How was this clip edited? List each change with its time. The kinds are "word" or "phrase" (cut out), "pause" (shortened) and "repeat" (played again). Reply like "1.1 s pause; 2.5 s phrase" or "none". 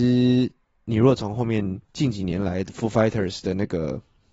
1.8 s pause